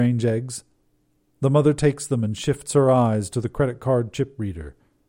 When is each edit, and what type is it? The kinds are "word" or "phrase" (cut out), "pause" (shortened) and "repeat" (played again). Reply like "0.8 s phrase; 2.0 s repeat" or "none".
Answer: none